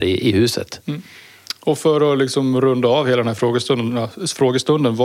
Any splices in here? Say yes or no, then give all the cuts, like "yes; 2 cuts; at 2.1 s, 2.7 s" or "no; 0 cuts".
no; 0 cuts